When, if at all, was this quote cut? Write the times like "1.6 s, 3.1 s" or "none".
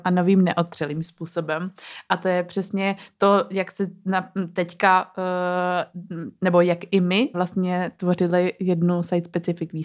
7.3 s